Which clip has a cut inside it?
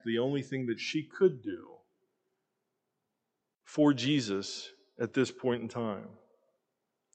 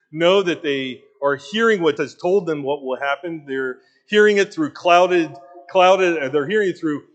second; 1 cut; at 2.0 s

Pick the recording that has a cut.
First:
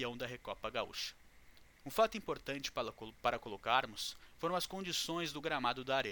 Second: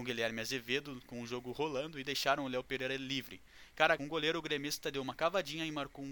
second; 1 cut; at 4.0 s

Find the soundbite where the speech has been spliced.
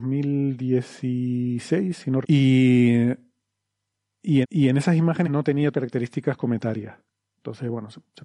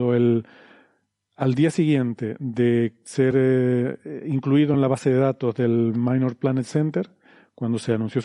first; 4 cuts; at 2.2 s, 4.4 s, 5.2 s, 5.7 s

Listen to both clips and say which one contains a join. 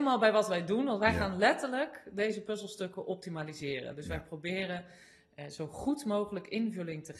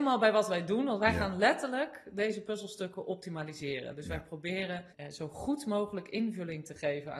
second; 1 cut; at 4.9 s

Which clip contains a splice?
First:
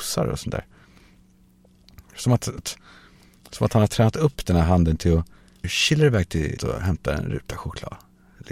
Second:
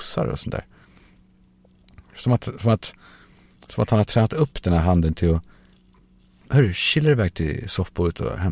first; 3 cuts; at 2.6 s, 5.6 s, 6.6 s

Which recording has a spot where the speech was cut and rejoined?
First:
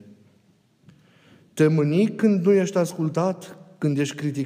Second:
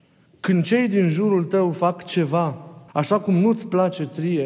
second; 1 cut; at 2.9 s

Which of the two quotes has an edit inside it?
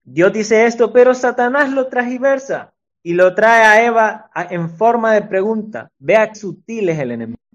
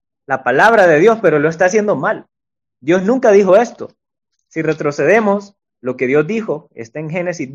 first; 2 cuts; at 2.9 s, 6.3 s

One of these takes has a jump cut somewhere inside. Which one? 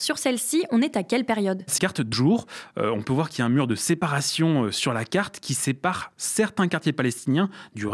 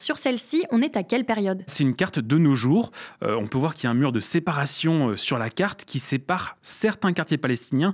first; 2 cuts; at 1.8 s, 2.1 s

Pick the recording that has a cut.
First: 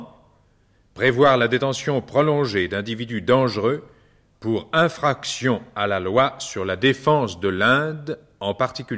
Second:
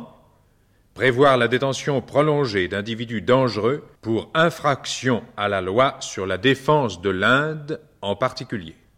second; 1 cut; at 4.0 s

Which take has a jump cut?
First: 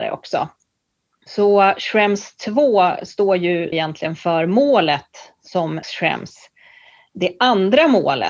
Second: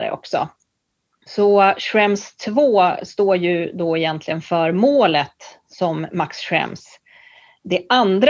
first; 2 cuts; at 3.7 s, 5.8 s

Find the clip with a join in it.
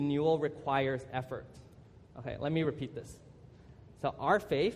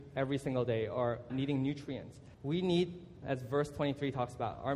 second; 3 cuts; at 1.3 s, 2.3 s, 3.2 s

